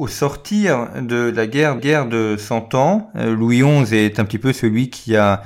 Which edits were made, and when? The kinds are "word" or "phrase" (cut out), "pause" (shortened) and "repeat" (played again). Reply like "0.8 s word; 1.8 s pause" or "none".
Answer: 1.8 s repeat

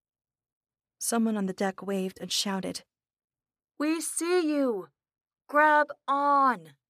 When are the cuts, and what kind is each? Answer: none

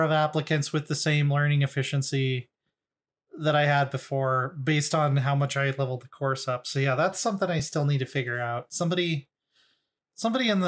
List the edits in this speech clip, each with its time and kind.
none

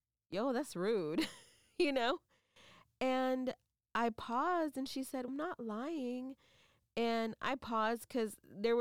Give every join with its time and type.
5.3 s word

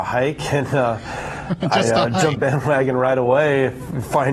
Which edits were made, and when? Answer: 2.4 s phrase

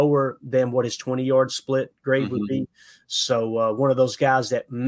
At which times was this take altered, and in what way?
none

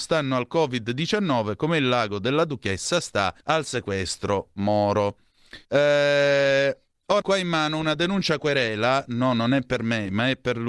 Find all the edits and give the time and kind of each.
3.4 s pause; 5.6 s pause; 7.2 s phrase

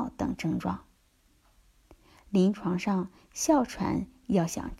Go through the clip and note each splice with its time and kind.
none

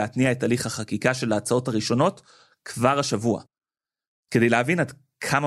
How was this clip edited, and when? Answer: none

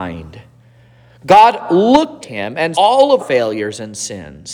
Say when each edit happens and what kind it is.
2.2 s word; 2.7 s word; 3.2 s word

